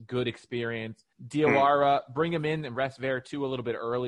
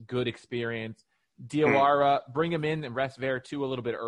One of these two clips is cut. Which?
first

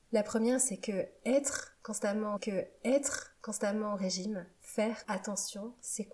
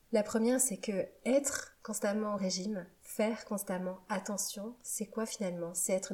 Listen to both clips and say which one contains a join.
first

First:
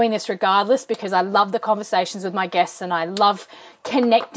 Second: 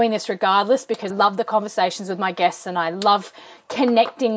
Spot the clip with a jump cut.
second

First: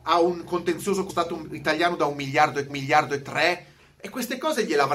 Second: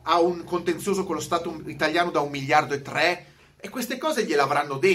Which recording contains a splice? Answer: first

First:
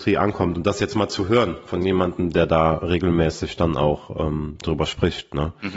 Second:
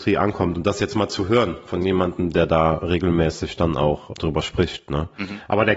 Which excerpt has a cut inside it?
second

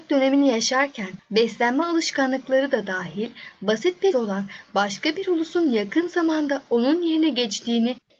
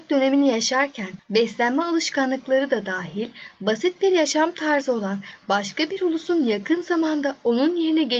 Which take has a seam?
first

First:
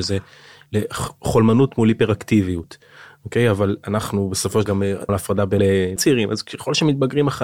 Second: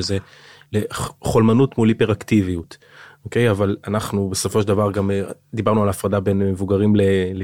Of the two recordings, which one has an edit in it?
first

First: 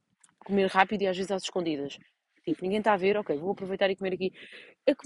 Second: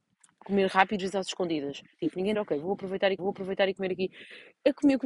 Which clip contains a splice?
second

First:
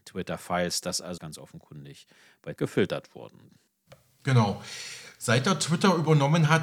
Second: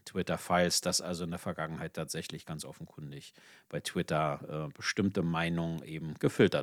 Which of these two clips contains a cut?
first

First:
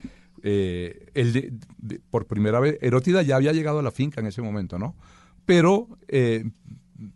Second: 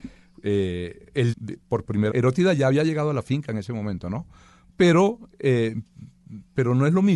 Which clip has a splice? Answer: second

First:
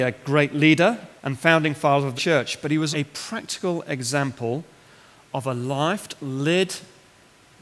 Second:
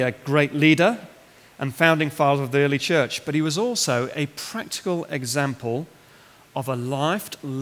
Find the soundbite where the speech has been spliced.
first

